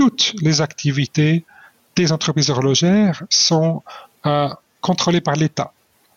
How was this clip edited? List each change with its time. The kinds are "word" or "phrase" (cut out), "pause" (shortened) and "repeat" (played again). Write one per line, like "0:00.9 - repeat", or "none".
none